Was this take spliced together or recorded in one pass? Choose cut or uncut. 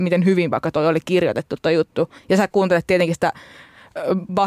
cut